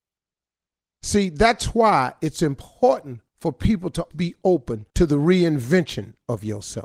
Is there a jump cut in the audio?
yes; 3 cuts; at 3.3 s, 4.1 s, 4.9 s

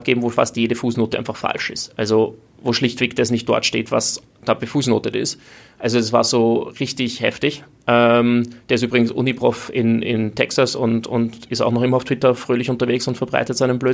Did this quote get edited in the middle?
no; 0 cuts

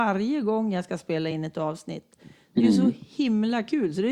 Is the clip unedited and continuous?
yes; 0 cuts

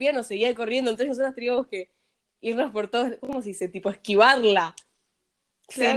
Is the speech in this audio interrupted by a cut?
no; 0 cuts

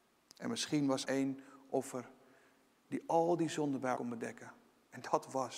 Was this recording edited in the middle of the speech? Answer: yes; 2 cuts; at 1.0 s, 3.9 s

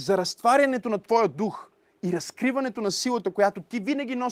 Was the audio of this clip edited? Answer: no; 0 cuts

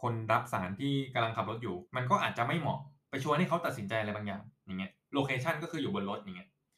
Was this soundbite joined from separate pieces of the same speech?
yes; 1 cut; at 1.9 s

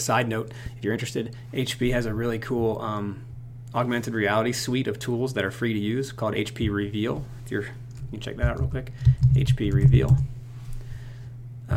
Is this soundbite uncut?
yes; 0 cuts

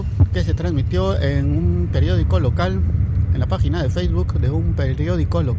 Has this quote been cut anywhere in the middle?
no; 0 cuts

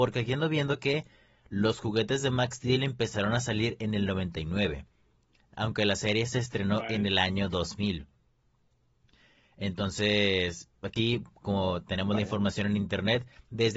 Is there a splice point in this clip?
no; 0 cuts

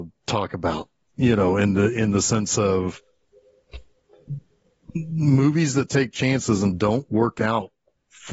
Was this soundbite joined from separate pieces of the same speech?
no; 0 cuts

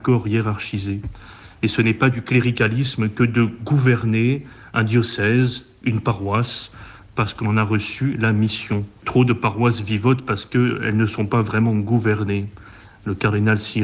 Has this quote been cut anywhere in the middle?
no; 0 cuts

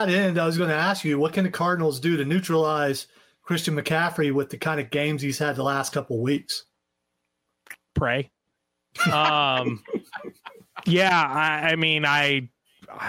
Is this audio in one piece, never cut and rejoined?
yes; 0 cuts

